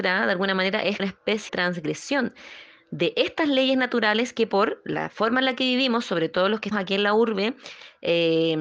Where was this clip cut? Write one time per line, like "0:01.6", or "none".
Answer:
0:01.0
0:01.5
0:06.7